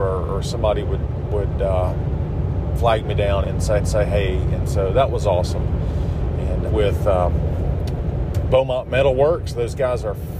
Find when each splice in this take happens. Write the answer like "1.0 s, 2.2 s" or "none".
3.4 s, 3.8 s, 6.7 s